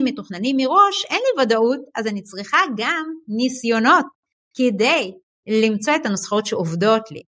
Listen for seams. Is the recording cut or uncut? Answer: uncut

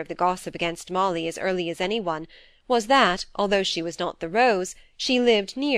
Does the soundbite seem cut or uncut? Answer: uncut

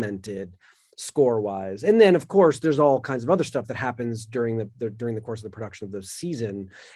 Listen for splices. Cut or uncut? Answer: uncut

